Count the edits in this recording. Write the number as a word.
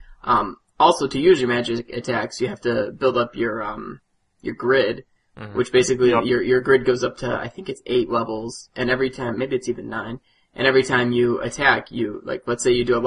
zero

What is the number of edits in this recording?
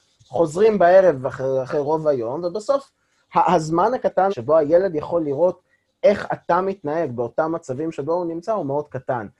one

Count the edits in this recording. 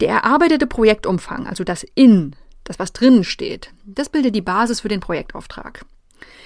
zero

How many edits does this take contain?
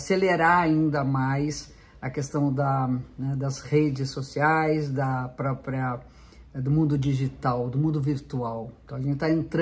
zero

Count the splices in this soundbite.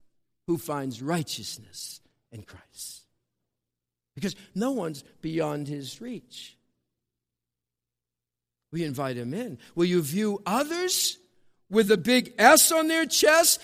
zero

